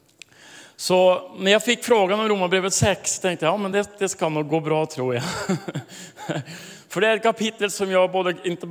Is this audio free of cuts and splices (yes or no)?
yes